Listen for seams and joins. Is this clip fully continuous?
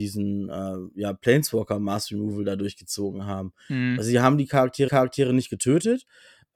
no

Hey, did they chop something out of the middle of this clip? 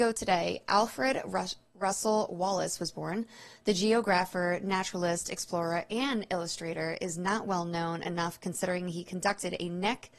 no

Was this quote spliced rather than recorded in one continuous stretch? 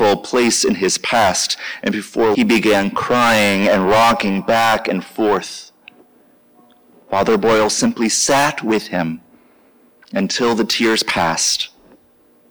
yes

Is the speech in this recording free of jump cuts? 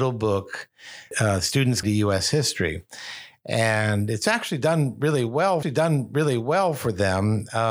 no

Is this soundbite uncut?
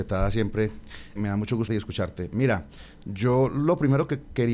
no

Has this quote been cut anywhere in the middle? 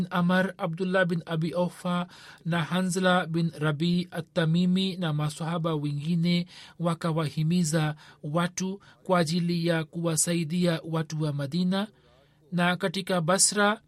no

